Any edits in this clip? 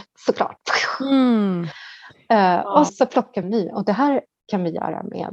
yes; 2 cuts; at 2.9 s, 3.4 s

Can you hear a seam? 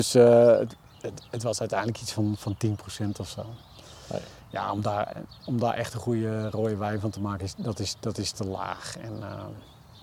no; 0 cuts

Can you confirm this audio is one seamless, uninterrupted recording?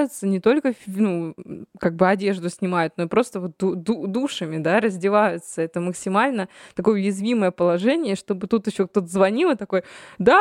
yes; 0 cuts

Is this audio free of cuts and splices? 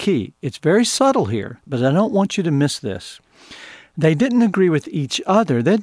no; 1 cut; at 1.6 s

